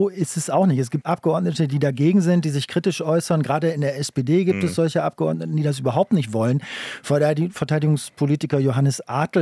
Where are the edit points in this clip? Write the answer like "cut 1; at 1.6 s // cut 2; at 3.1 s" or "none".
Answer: cut 1; at 1.0 s